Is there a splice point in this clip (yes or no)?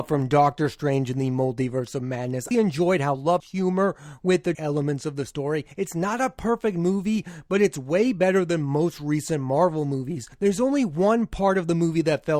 yes